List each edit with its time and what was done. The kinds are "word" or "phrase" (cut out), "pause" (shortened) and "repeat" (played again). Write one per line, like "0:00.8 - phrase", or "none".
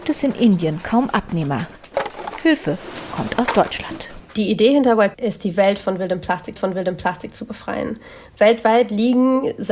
0:05.1 - word
0:06.6 - repeat